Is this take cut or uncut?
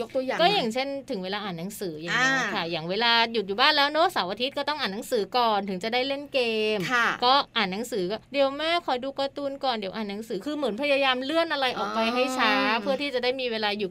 cut